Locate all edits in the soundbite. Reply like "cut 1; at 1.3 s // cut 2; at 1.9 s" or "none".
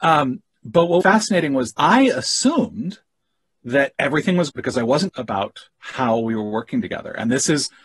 cut 1; at 1.0 s // cut 2; at 1.7 s // cut 3; at 3.9 s // cut 4; at 4.5 s // cut 5; at 5.1 s

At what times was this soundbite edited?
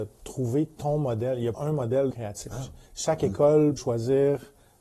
cut 1; at 1.5 s // cut 2; at 2.1 s // cut 3; at 2.9 s // cut 4; at 3.8 s

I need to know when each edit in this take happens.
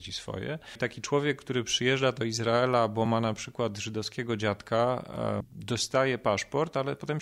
none

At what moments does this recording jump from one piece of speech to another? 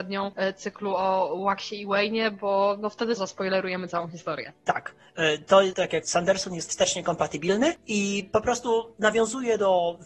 cut 1; at 3.2 s // cut 2; at 6.0 s

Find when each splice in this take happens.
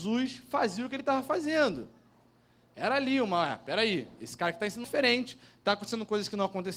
cut 1; at 4.8 s

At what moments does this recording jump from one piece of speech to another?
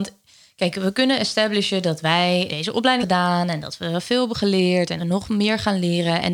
cut 1; at 2.5 s // cut 2; at 3.0 s // cut 3; at 5.0 s

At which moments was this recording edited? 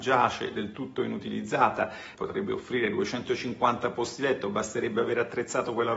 cut 1; at 2.1 s

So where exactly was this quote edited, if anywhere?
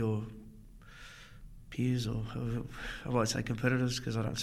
none

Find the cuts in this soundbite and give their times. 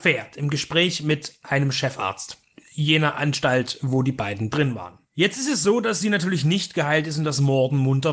none

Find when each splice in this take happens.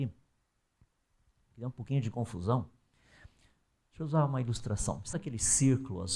cut 1; at 5.1 s

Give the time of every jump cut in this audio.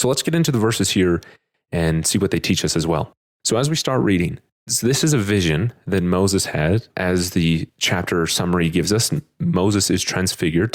cut 1; at 4.7 s

